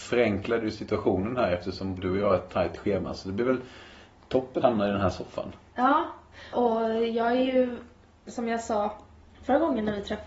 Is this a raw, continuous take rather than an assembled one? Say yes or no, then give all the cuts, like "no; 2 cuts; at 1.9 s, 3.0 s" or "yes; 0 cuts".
no; 3 cuts; at 2.0 s, 4.6 s, 6.5 s